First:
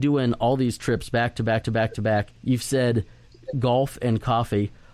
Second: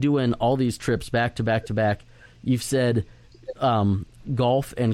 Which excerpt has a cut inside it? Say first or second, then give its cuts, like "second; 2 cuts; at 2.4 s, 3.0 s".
first; 3 cuts; at 1.6 s, 2.4 s, 3.5 s